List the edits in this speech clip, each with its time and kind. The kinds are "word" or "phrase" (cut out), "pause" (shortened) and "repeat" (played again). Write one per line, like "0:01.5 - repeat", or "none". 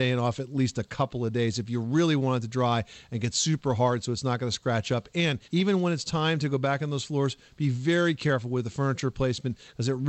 0:05.4 - pause